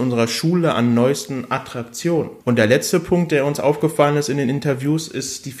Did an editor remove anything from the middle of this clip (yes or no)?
yes